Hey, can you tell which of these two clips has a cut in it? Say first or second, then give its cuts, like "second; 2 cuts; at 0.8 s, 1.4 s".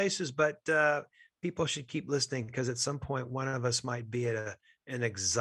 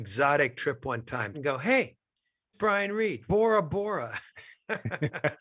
second; 4 cuts; at 1.3 s, 2.5 s, 3.3 s, 4.3 s